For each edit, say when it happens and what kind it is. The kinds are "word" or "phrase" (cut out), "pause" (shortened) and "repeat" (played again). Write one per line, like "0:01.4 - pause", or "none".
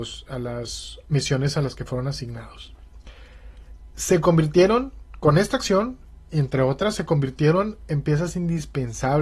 none